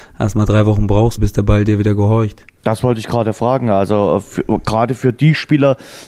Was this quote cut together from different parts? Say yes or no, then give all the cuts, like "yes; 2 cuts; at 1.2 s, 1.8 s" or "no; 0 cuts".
yes; 1 cut; at 2.6 s